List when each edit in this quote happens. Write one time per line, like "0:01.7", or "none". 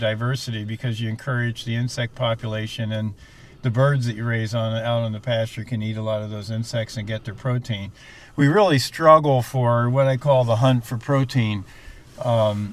none